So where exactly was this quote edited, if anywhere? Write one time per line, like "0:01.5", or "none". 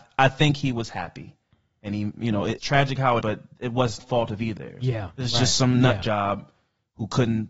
0:02.6
0:03.2
0:04.0
0:04.6